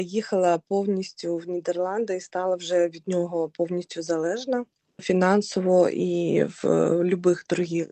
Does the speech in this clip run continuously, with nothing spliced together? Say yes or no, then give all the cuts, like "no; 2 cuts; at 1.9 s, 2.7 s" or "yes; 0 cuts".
yes; 0 cuts